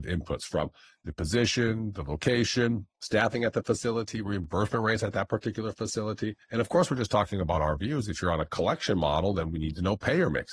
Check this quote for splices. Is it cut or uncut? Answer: cut